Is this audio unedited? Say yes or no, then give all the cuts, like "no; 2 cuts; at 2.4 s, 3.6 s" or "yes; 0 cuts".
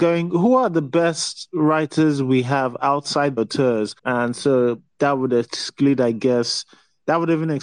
no; 2 cuts; at 3.4 s, 4.0 s